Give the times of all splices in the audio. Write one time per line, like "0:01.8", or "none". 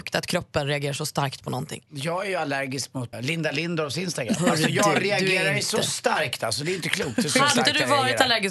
0:03.1